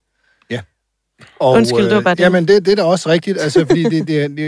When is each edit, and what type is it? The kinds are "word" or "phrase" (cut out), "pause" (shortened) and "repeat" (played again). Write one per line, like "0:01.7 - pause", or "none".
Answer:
none